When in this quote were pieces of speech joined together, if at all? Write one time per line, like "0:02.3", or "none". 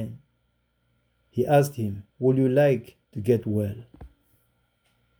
0:02.1
0:03.0